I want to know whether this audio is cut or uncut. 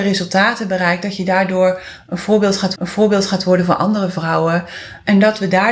cut